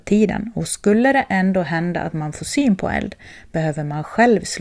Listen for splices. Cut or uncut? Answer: uncut